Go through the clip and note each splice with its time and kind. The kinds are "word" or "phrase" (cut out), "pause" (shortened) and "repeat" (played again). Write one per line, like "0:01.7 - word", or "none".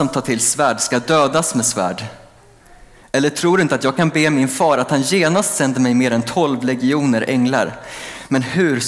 none